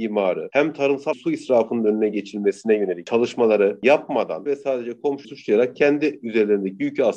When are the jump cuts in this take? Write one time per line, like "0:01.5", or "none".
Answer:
0:01.1
0:04.5
0:05.2